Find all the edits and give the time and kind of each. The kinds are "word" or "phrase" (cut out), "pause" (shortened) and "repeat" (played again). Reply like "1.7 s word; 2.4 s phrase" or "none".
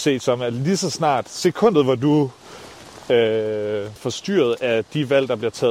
4.0 s word